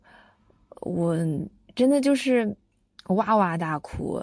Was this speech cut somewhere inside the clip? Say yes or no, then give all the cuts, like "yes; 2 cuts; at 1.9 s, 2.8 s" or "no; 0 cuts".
no; 0 cuts